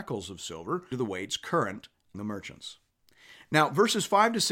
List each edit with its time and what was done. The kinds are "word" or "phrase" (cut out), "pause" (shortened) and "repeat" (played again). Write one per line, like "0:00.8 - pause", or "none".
0:00.9 - word
0:02.1 - word